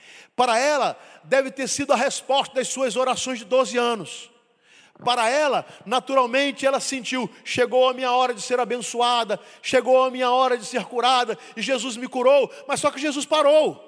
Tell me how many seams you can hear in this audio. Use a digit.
0